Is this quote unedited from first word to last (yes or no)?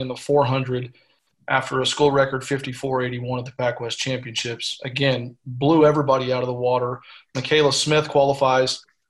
yes